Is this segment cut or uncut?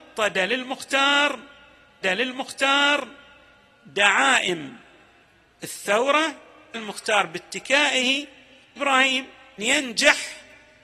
cut